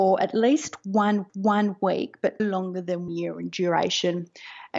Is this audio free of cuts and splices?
no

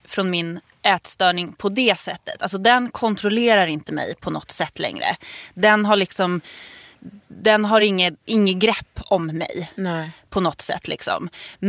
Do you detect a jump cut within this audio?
no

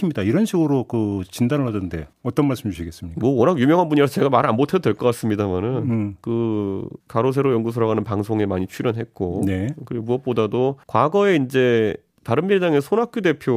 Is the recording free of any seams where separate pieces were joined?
no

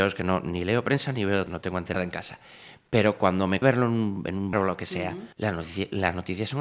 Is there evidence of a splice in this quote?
yes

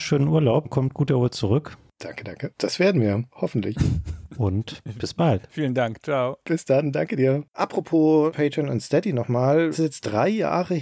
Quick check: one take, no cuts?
no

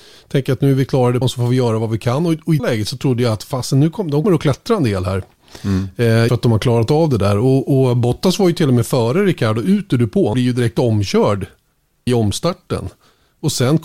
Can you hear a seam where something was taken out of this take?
yes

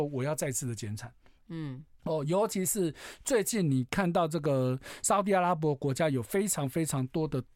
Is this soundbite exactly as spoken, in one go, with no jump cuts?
yes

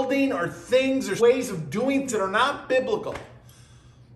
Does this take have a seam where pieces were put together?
yes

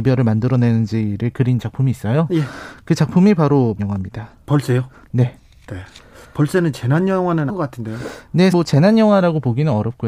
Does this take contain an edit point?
yes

